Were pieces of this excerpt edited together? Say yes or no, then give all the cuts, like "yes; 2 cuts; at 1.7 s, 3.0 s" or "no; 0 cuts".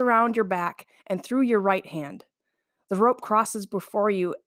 no; 0 cuts